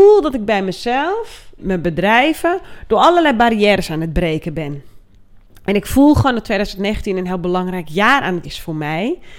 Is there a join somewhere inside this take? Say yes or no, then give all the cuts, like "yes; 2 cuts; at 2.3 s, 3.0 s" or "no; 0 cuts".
yes; 2 cuts; at 1.6 s, 8.4 s